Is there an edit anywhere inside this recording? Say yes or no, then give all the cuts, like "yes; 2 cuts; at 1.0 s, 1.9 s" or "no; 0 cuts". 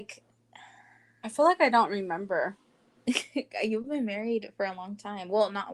no; 0 cuts